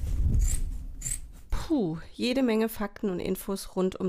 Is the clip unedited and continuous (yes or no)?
yes